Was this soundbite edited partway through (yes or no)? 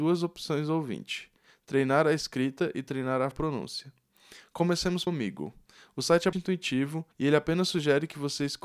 yes